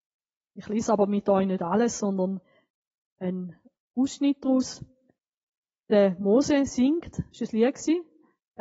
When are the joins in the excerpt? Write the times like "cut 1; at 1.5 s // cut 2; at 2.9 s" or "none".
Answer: none